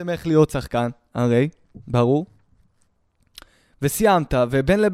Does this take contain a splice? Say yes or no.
no